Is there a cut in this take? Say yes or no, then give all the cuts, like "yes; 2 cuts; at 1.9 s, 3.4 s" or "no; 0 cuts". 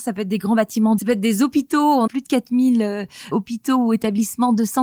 yes; 3 cuts; at 1.0 s, 2.1 s, 3.3 s